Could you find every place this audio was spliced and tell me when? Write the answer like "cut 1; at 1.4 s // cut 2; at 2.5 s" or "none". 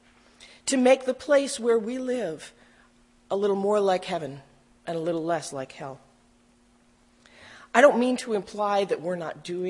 none